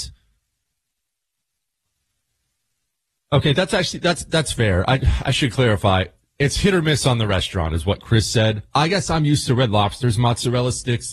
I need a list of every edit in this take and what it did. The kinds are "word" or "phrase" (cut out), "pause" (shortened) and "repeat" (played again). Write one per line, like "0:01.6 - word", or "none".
none